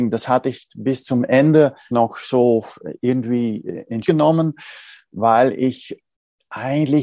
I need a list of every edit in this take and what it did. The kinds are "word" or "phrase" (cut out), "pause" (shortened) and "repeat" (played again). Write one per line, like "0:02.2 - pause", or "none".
0:01.9 - word
0:04.0 - word

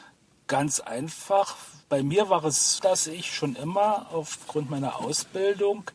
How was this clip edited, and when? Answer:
0:01.8 - pause
0:02.8 - word

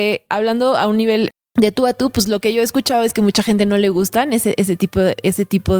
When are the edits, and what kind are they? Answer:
none

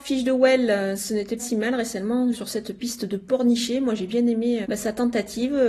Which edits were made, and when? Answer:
0:01.4 - word
0:02.3 - word
0:04.6 - word

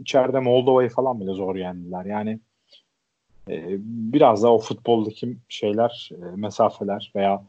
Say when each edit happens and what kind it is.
none

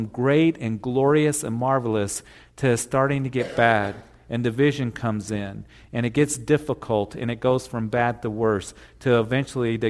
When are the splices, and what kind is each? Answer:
none

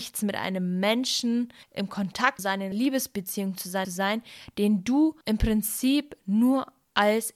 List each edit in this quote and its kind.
0:01.6 - pause
0:02.4 - word
0:02.7 - word
0:03.8 - phrase
0:05.2 - pause

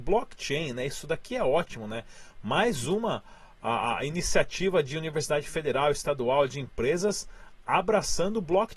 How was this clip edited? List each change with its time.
none

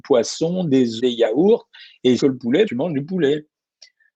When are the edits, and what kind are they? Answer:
0:01.0 - phrase
0:02.2 - phrase
0:02.6 - word

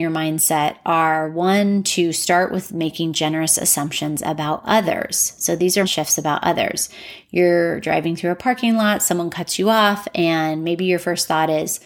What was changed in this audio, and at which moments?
0:05.8 - word

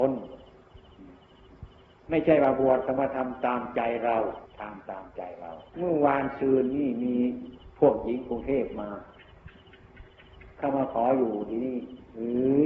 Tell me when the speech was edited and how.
0:01.9 - pause
0:04.5 - pause
0:05.7 - pause

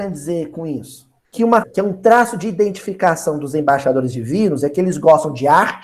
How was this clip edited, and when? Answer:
0:01.2 - pause
0:01.6 - phrase

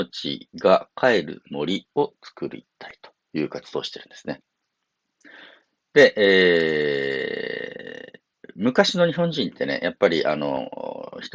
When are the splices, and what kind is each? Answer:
none

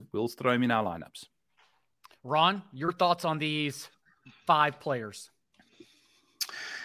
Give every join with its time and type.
none

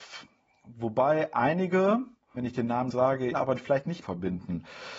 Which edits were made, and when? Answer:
0:02.4 - phrase
0:02.9 - word
0:03.3 - phrase
0:04.0 - phrase

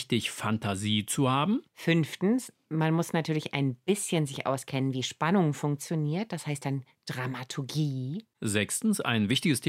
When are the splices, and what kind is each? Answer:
0:01.7 - pause

